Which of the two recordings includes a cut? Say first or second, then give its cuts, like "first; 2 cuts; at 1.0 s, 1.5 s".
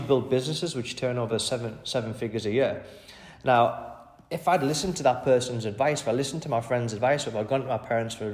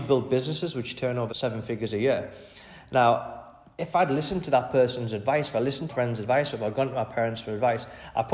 second; 2 cuts; at 1.3 s, 5.9 s